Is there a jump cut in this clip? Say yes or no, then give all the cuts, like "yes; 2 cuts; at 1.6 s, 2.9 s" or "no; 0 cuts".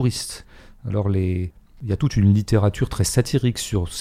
no; 0 cuts